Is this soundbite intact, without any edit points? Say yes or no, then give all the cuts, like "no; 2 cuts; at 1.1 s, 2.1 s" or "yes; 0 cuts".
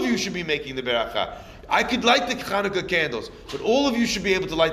yes; 0 cuts